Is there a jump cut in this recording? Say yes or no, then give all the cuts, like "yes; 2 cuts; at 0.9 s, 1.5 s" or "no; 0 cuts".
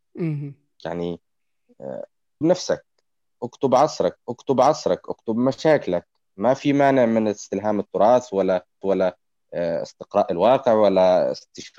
yes; 3 cuts; at 2.4 s, 4.2 s, 8.8 s